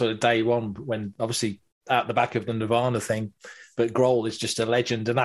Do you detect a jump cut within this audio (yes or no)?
no